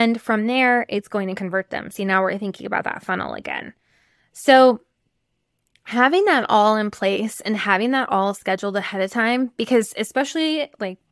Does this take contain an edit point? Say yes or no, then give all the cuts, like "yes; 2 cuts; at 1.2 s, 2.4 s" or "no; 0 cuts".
no; 0 cuts